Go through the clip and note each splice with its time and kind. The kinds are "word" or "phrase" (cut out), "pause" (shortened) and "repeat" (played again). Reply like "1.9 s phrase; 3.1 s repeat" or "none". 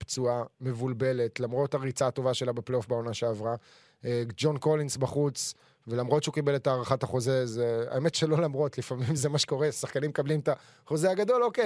none